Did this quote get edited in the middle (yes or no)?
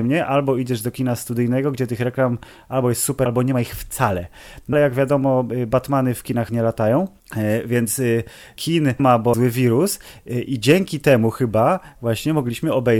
yes